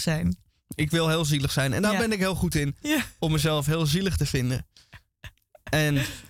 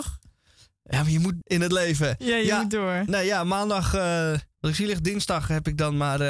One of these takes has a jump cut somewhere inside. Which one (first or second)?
second